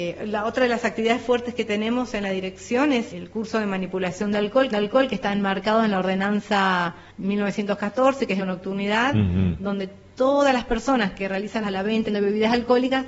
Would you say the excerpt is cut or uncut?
cut